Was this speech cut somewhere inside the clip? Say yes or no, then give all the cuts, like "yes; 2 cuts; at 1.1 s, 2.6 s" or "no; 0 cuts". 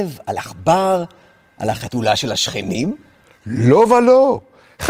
no; 0 cuts